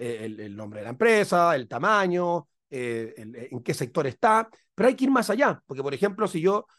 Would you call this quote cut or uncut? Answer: uncut